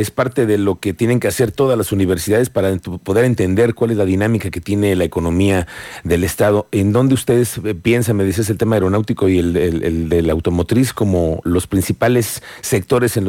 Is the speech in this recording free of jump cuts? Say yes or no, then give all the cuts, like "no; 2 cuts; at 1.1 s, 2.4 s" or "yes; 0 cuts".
yes; 0 cuts